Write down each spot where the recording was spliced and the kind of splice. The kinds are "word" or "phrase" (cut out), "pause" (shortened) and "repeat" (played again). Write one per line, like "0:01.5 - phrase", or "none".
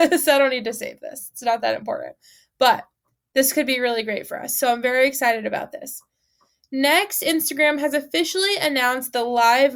none